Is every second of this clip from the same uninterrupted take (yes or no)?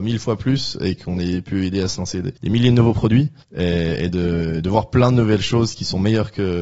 no